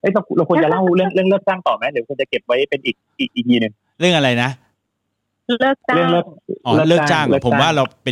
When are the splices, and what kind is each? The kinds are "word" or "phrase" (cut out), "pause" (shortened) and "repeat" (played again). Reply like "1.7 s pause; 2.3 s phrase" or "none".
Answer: none